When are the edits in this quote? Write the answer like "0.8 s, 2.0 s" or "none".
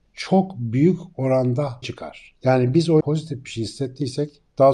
1.8 s, 3.0 s